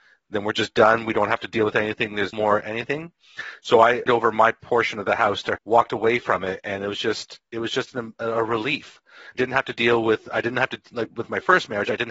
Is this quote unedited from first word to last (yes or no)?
no